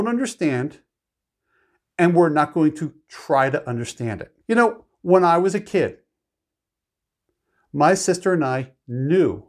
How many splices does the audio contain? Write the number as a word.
one